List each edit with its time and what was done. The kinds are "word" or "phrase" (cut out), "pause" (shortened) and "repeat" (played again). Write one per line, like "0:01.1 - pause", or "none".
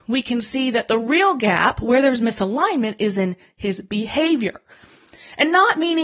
none